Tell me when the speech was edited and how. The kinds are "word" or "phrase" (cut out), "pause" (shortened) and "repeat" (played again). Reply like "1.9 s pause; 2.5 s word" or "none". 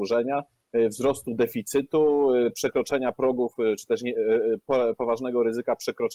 none